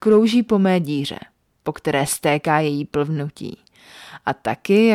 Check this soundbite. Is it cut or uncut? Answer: uncut